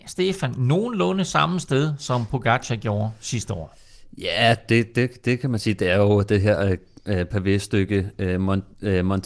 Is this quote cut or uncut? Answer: uncut